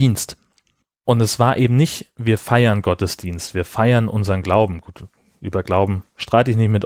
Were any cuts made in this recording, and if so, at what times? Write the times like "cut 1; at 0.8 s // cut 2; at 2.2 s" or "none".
none